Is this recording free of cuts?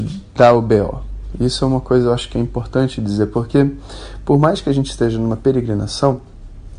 yes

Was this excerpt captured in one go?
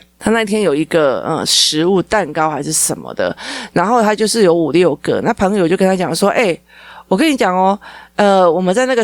yes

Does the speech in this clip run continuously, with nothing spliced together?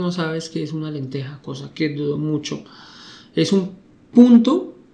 yes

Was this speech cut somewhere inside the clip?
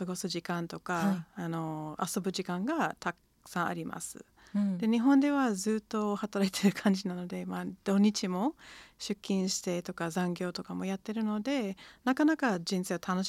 no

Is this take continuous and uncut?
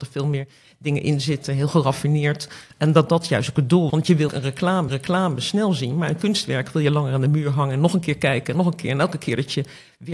no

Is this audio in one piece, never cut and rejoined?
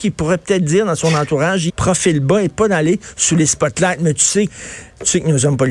no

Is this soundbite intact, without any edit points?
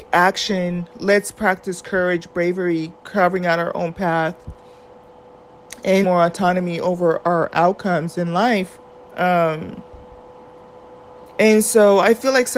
no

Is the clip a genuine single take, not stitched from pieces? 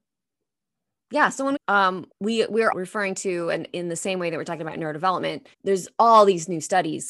no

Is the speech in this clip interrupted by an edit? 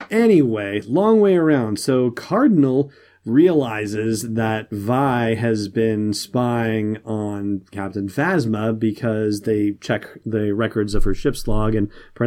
no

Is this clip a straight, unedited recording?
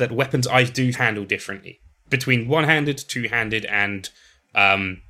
no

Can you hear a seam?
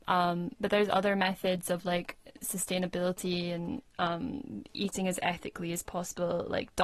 no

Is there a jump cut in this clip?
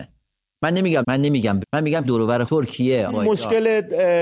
yes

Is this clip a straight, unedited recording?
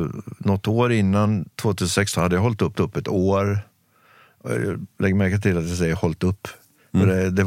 no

